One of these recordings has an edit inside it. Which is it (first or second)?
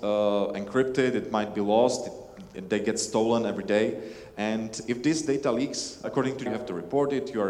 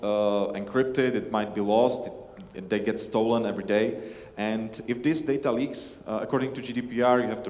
first